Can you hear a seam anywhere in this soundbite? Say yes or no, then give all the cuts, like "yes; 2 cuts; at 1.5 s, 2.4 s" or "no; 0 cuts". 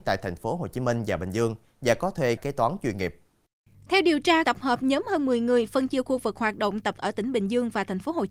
yes; 3 cuts; at 2.4 s, 4.4 s, 7.0 s